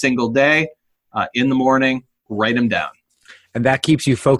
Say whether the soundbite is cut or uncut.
uncut